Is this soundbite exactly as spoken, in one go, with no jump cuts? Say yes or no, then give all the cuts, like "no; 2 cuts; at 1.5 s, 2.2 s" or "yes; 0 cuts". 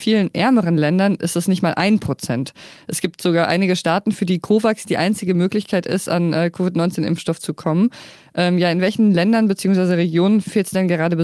yes; 0 cuts